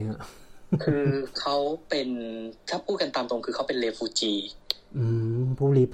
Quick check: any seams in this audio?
yes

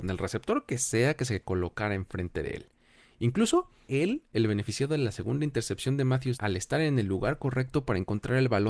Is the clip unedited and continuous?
no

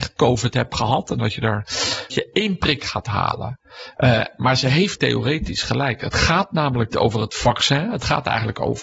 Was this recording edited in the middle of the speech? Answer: yes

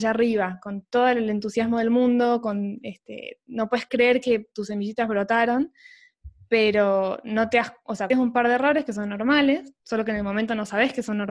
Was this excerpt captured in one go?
no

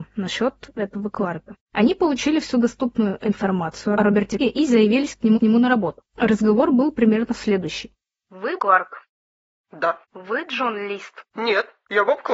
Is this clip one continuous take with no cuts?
no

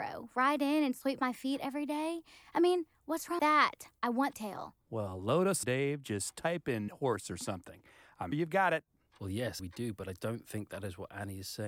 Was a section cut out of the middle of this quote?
yes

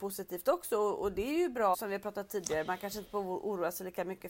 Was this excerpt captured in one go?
no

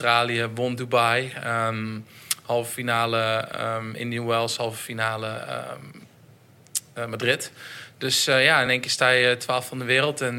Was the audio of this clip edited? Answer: no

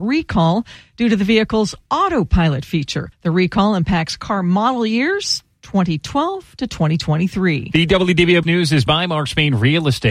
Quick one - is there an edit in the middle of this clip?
yes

